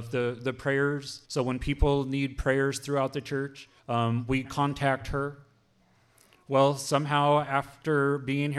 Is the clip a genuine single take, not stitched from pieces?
no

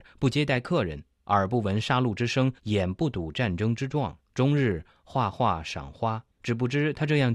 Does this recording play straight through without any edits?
no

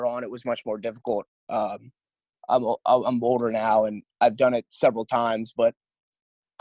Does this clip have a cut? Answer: no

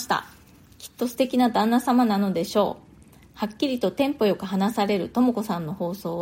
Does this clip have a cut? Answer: no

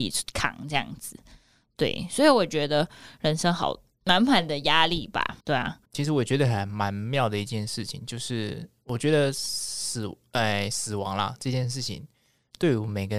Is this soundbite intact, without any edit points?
no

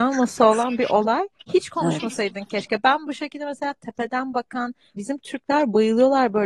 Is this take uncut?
no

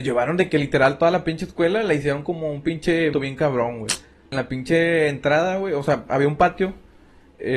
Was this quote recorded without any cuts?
no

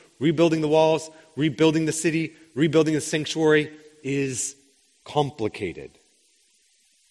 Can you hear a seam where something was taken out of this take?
no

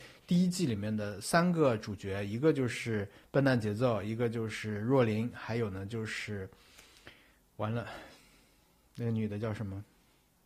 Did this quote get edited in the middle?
no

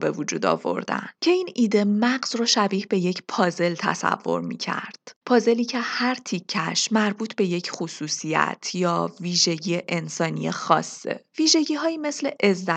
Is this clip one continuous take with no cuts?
no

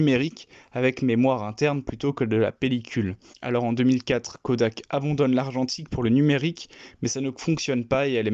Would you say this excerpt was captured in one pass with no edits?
no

